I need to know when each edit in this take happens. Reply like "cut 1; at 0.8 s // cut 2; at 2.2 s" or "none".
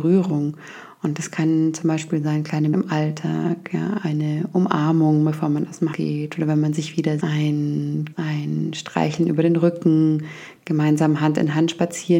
cut 1; at 2.7 s // cut 2; at 5.9 s // cut 3; at 7.2 s // cut 4; at 8.1 s